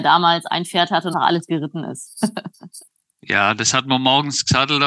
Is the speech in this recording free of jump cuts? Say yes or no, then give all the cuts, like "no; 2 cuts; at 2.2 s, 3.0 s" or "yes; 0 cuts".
no; 1 cut; at 1.1 s